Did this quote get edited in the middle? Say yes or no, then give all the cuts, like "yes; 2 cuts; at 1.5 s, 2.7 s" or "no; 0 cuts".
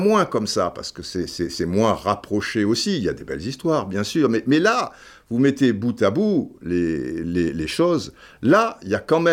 no; 0 cuts